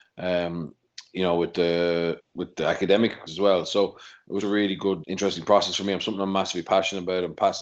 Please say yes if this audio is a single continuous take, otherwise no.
no